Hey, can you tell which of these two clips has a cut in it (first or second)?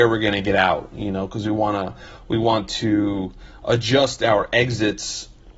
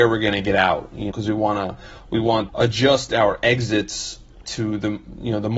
second